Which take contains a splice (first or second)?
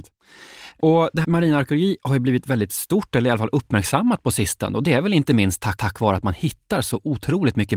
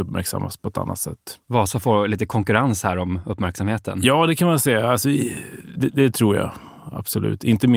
first